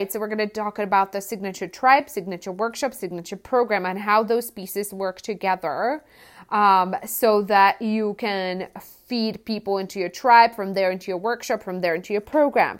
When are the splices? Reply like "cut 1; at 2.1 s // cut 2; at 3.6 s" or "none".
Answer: none